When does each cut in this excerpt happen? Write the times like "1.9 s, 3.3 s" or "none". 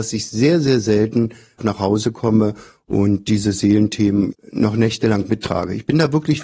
none